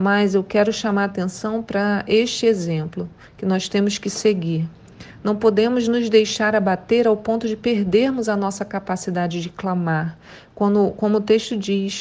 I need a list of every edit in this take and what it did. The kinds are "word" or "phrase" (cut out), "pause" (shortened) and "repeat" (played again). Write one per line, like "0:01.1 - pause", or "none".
none